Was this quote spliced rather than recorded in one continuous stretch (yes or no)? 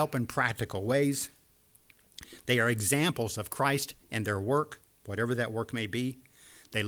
no